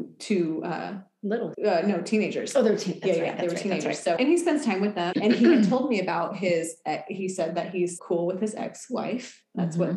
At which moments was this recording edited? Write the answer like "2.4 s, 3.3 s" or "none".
1.5 s, 4.2 s, 5.1 s, 8.0 s